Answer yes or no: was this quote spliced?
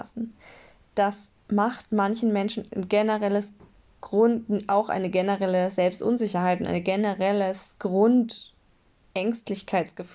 yes